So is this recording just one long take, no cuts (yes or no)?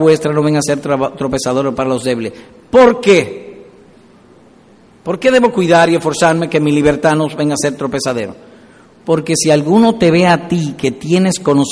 yes